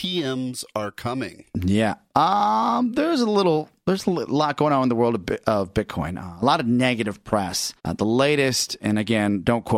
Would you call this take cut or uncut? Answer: cut